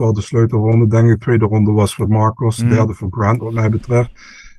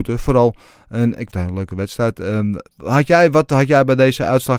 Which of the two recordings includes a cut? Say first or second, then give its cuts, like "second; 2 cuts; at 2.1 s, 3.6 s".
second; 2 cuts; at 1.3 s, 2.7 s